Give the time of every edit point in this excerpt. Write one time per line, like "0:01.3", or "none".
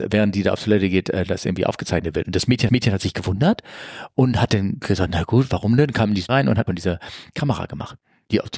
0:02.7
0:06.3
0:06.7